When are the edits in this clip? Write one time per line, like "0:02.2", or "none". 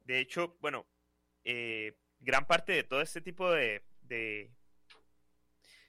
none